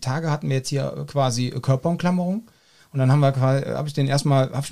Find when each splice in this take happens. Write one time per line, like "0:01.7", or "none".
none